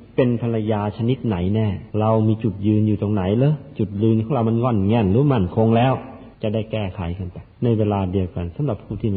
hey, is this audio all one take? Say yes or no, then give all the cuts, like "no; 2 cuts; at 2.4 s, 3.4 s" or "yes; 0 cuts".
no; 3 cuts; at 1.9 s, 6.3 s, 7.5 s